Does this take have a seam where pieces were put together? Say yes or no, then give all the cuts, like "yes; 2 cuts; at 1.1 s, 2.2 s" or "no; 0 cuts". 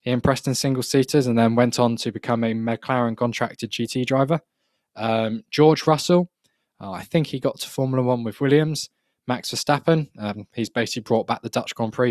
no; 0 cuts